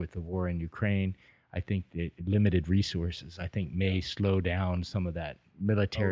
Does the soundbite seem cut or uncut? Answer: uncut